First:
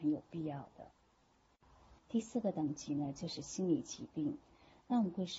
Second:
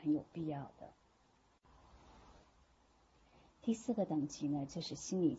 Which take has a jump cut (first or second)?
first